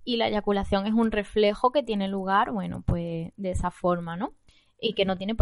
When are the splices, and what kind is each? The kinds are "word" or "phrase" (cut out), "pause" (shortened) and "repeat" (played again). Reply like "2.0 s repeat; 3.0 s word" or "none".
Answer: none